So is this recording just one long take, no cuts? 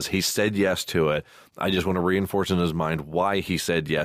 yes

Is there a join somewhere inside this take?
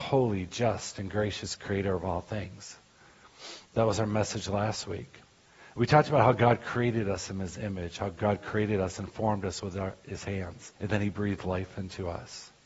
yes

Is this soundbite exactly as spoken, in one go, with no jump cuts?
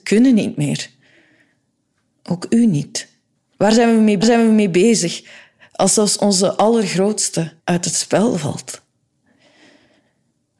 no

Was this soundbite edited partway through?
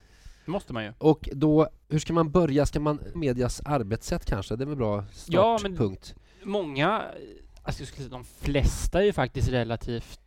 yes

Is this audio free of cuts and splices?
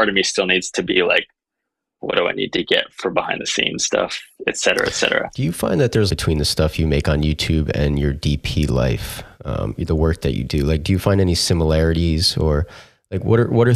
no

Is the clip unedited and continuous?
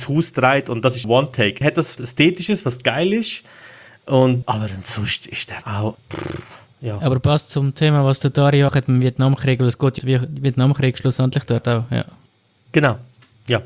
no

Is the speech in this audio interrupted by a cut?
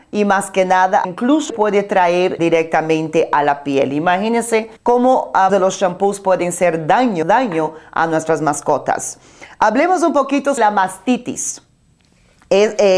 yes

